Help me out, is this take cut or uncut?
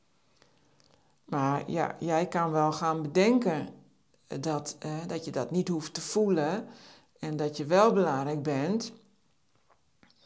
uncut